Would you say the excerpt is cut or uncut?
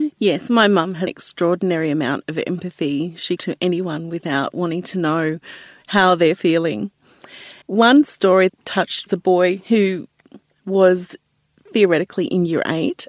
cut